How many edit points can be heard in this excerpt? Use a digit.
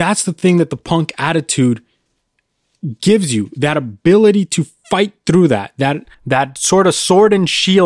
1